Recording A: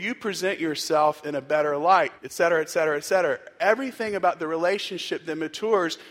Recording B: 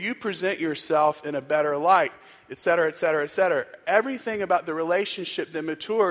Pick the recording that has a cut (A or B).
A